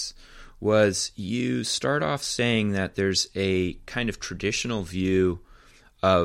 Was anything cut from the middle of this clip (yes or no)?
no